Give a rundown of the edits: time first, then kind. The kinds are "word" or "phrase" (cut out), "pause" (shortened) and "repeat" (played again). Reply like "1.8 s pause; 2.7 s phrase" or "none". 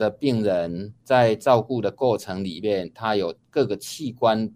1.0 s pause